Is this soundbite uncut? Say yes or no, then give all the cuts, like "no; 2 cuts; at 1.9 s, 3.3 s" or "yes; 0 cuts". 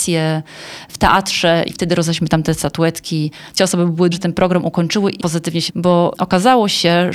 no; 5 cuts; at 1.7 s, 3.6 s, 4.1 s, 5.2 s, 5.7 s